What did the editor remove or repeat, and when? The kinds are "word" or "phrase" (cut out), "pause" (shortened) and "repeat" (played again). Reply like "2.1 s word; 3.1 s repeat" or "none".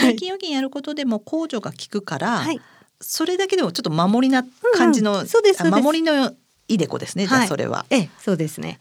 none